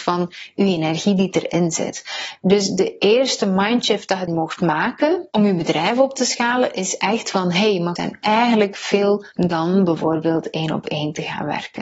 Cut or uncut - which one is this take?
cut